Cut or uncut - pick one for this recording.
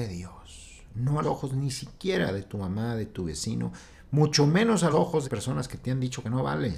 cut